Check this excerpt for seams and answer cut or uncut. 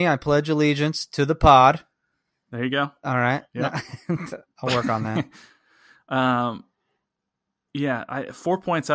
uncut